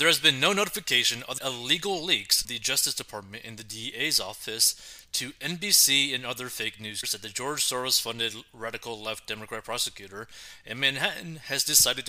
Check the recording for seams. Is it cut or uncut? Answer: cut